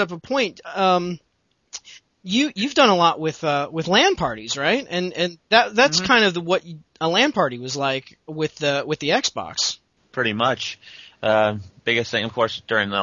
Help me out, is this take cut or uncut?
uncut